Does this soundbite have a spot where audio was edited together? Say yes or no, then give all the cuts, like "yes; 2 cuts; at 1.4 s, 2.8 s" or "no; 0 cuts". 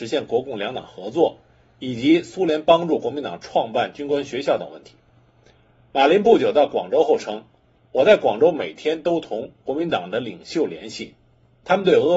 no; 0 cuts